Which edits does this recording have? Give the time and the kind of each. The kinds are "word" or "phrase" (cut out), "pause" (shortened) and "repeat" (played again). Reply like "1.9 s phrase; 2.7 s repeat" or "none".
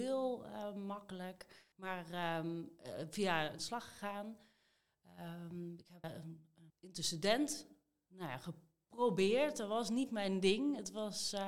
1.7 s pause; 3.6 s phrase; 6.0 s word; 6.7 s pause